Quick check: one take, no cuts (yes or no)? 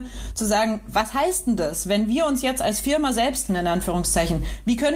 no